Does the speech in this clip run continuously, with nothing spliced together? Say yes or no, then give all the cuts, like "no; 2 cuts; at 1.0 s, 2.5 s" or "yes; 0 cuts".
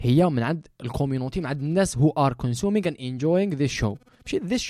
yes; 0 cuts